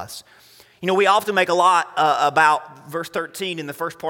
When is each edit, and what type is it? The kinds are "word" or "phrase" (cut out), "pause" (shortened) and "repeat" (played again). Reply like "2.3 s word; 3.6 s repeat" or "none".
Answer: none